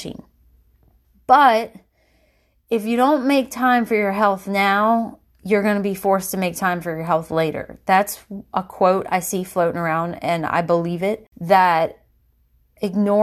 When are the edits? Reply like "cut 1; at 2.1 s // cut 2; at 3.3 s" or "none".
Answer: cut 1; at 11.3 s